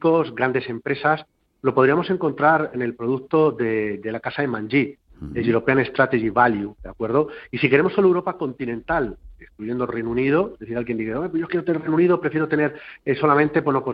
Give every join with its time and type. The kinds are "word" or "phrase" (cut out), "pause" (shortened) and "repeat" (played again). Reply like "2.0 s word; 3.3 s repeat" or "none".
11.5 s word